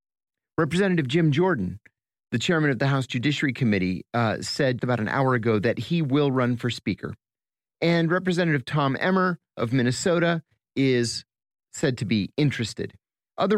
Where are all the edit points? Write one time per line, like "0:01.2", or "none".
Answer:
0:04.8